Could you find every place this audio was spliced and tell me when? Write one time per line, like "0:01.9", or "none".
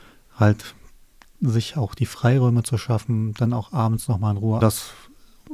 0:04.6